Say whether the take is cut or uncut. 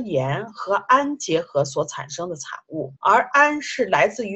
cut